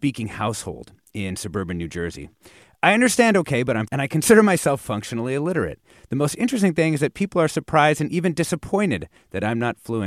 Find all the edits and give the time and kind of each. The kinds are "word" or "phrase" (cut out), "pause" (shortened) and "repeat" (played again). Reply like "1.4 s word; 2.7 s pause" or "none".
3.9 s phrase